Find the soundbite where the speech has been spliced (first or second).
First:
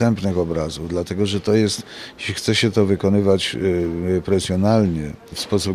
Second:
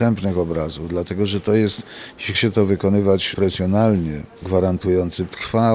second